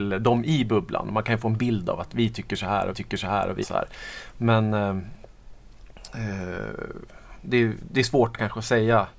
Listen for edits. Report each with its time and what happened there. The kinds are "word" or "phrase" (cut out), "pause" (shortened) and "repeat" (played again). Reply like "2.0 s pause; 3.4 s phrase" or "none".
2.9 s repeat; 3.6 s word; 7.4 s word